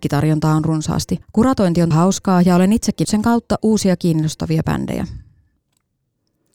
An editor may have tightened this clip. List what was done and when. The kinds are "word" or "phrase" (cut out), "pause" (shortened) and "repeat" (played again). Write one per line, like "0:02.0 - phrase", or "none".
0:01.2 - word
0:01.9 - word
0:03.0 - word

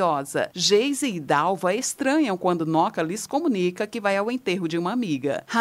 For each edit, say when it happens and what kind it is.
none

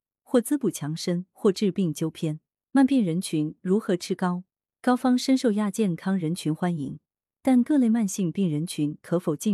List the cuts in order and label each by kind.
none

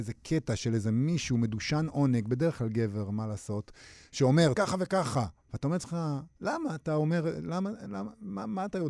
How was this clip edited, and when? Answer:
0:04.5 - phrase
0:05.4 - pause
0:06.3 - pause

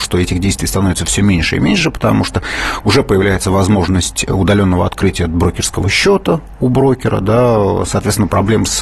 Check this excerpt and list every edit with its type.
none

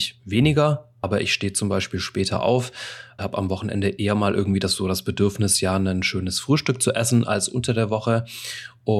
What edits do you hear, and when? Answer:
0:03.2 - word

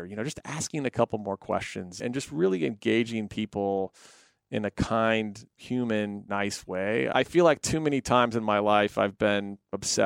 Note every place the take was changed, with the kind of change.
none

